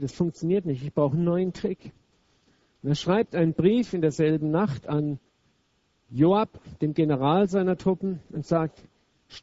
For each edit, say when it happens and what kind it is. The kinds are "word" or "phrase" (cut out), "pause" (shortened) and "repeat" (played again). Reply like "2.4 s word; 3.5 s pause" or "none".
none